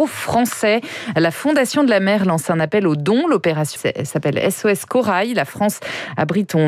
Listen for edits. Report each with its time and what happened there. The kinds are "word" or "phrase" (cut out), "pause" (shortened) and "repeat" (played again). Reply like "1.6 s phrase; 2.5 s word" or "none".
3.8 s word